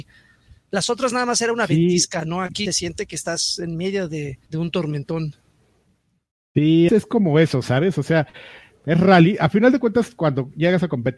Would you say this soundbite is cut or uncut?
cut